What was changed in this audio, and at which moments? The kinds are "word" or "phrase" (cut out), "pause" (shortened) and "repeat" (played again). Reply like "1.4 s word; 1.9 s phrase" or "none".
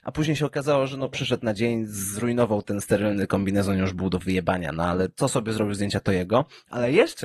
none